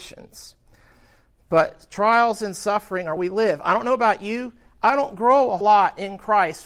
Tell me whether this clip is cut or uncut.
cut